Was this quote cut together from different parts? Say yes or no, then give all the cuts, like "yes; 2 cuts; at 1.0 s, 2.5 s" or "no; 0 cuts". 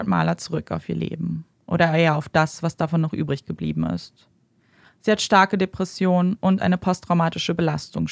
no; 0 cuts